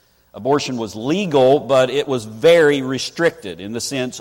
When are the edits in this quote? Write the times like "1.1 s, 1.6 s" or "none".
none